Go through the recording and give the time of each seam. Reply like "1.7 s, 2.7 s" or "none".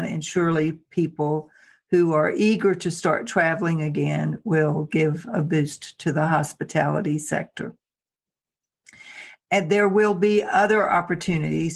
none

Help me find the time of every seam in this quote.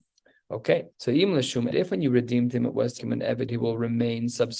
0.9 s, 1.7 s, 3.0 s, 3.5 s

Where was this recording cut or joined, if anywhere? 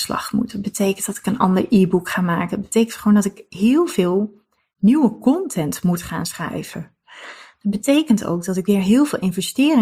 none

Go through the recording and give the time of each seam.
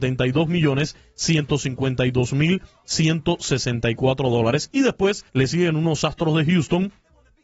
5.3 s

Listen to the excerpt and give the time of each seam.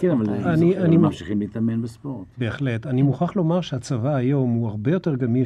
none

